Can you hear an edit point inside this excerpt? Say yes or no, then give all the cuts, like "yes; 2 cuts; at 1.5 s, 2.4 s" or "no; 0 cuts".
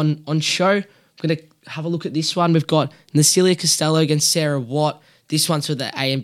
no; 0 cuts